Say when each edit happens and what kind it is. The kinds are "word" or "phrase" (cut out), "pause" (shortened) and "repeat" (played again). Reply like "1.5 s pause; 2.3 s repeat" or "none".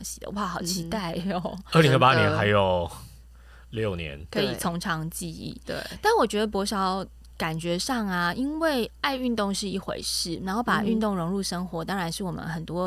4.3 s word